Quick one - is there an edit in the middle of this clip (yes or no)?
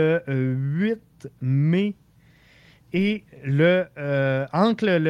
no